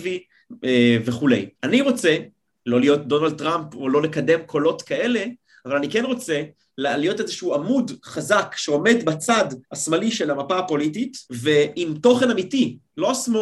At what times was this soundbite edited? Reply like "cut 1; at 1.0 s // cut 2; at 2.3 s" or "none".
cut 1; at 1.5 s // cut 2; at 9.6 s // cut 3; at 11.2 s